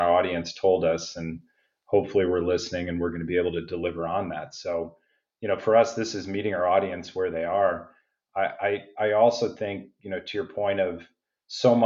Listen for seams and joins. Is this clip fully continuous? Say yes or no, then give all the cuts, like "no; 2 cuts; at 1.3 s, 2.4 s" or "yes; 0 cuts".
yes; 0 cuts